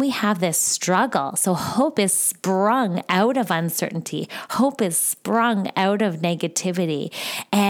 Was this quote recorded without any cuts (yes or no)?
yes